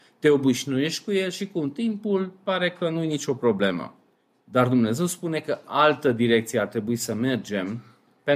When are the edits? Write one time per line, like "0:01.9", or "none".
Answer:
none